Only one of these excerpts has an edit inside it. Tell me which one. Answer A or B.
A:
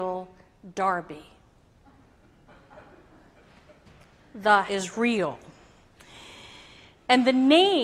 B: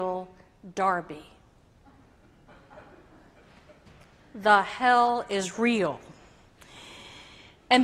A